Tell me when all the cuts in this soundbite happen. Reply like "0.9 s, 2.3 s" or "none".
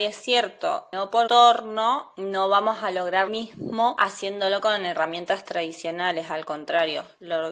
1.3 s, 3.3 s